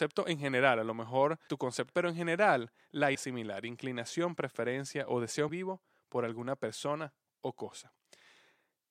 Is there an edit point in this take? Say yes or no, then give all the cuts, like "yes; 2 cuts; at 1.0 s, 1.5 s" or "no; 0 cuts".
yes; 4 cuts; at 1.5 s, 1.9 s, 3.1 s, 5.5 s